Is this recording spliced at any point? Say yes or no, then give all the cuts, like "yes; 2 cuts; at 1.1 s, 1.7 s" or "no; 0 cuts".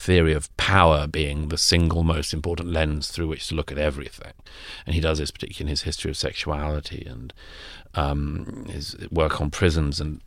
no; 0 cuts